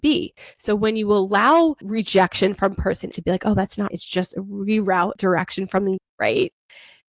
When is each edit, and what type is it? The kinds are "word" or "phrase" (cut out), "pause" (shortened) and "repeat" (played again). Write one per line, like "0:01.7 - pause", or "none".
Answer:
0:01.8 - word
0:03.1 - word
0:03.9 - word
0:05.1 - word
0:06.0 - word